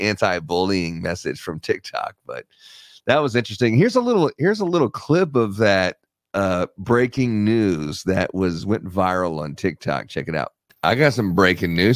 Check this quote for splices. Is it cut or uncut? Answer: uncut